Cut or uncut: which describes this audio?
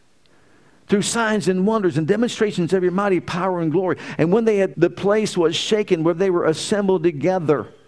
cut